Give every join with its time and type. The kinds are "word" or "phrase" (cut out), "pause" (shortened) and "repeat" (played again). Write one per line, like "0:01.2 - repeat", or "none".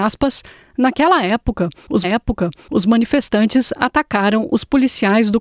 0:02.0 - repeat